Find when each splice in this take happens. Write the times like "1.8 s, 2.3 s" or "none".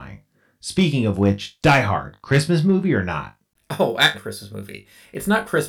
4.1 s